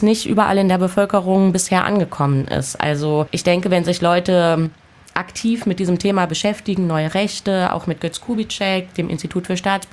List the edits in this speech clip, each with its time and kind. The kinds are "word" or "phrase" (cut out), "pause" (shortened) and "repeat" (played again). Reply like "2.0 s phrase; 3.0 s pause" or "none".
none